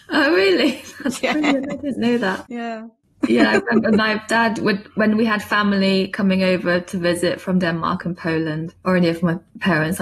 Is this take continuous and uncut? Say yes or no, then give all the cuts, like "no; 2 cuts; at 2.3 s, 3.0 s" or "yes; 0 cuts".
yes; 0 cuts